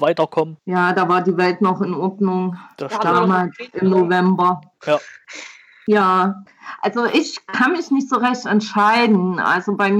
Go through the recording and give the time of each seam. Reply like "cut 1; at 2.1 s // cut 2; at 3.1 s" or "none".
none